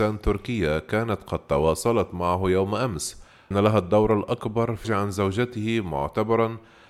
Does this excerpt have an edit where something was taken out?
yes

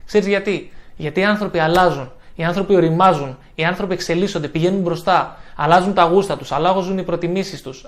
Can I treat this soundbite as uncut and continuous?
yes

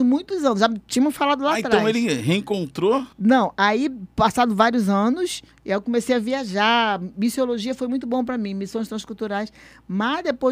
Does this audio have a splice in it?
yes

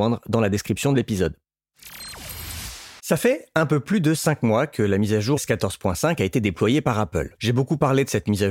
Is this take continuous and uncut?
no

